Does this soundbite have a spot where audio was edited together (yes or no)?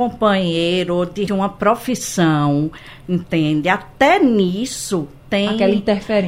yes